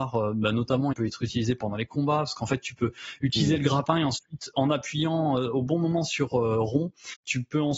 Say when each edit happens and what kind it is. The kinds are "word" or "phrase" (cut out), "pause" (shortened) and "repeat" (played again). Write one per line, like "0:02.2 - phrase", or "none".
0:00.9 - word
0:04.5 - word